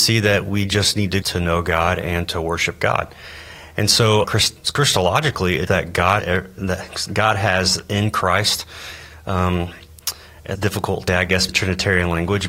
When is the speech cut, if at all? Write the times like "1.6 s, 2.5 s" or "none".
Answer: 1.2 s, 4.2 s, 5.7 s, 6.2 s, 10.5 s, 11.1 s, 11.5 s